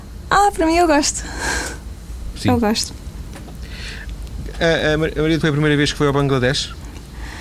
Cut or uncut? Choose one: cut